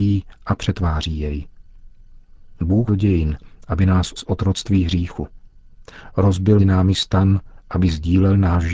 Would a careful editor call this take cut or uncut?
cut